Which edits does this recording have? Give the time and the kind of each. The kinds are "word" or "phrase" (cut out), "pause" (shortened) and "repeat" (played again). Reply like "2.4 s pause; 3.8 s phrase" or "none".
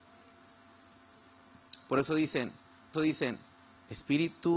2.9 s repeat